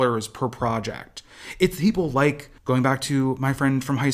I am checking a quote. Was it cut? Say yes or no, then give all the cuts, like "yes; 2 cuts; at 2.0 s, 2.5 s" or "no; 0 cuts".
yes; 1 cut; at 2.6 s